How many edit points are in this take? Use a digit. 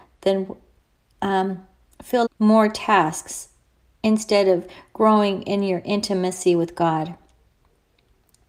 1